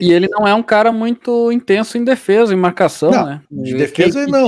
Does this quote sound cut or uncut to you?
uncut